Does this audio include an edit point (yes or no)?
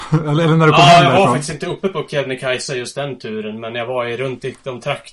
no